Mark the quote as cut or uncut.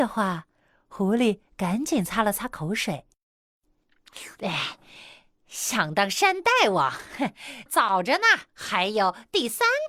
cut